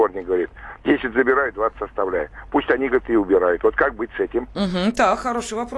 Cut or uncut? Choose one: uncut